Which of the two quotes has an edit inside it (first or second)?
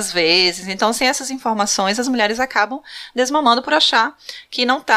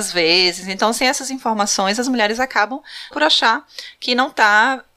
second